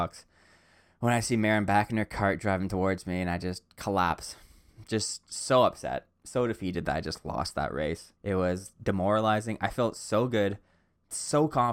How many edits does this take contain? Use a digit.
1